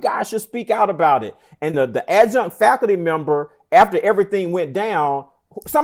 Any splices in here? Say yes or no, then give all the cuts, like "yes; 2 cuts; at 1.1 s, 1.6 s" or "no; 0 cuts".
yes; 1 cut; at 1.7 s